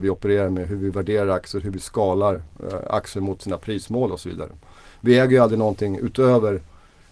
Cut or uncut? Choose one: uncut